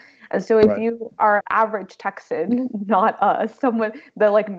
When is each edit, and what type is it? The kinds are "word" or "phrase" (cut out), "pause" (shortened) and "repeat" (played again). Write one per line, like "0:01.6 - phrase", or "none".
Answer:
0:01.4 - word